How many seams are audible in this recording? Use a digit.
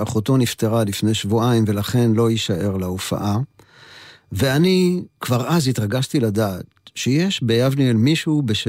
0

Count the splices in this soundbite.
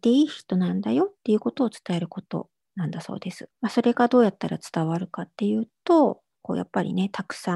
2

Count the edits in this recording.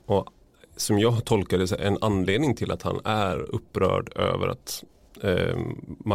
0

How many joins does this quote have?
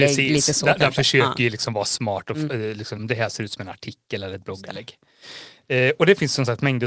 1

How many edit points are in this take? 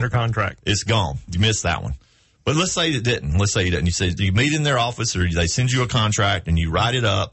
1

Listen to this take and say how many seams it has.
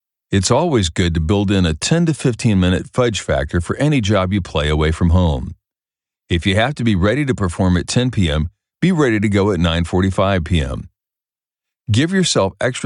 0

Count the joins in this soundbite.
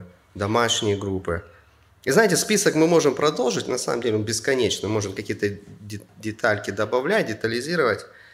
0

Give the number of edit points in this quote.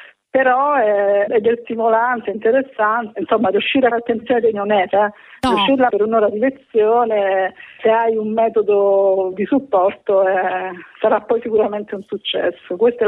9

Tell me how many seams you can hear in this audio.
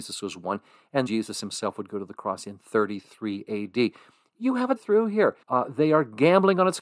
3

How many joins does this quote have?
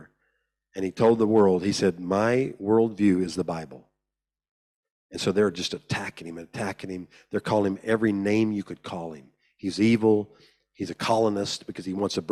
0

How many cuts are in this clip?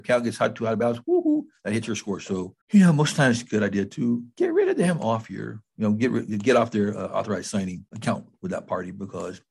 2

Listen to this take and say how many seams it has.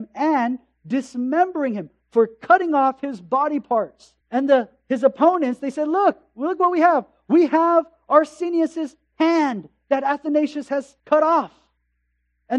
2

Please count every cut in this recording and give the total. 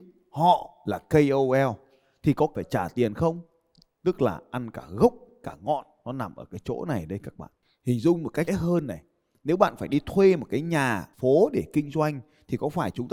3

